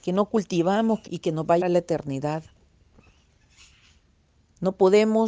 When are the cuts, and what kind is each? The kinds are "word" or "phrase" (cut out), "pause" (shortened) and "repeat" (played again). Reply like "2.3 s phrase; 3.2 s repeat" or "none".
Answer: 1.1 s word; 1.6 s word